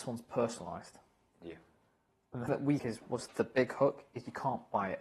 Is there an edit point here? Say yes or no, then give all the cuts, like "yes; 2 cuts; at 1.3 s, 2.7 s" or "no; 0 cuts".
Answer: yes; 3 cuts; at 2.5 s, 2.8 s, 3.3 s